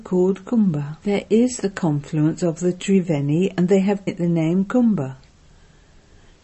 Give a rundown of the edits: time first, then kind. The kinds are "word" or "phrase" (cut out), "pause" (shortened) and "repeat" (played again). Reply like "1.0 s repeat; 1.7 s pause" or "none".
1.0 s pause; 4.1 s word

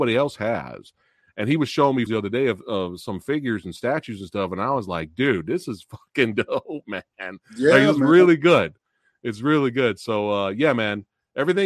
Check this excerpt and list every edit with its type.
2.1 s word

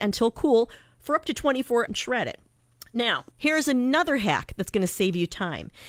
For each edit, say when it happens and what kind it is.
1.9 s word; 3.3 s pause

